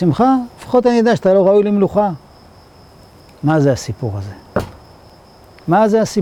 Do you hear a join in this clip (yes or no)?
no